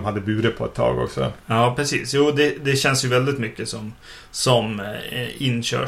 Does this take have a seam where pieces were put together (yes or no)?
no